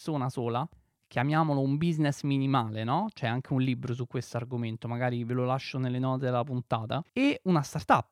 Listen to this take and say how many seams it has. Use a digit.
1